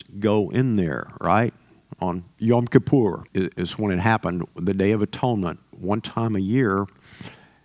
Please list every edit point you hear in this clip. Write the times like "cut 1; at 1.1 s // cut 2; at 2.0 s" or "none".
cut 1; at 3.3 s